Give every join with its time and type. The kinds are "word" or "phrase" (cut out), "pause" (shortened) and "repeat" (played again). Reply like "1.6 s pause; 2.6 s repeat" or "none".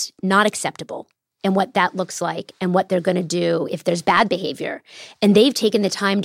none